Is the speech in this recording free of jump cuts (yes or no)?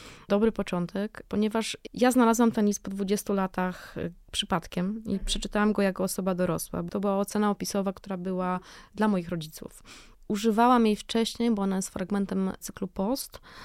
yes